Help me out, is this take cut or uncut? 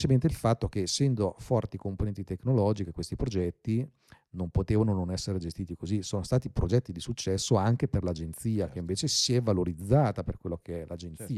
uncut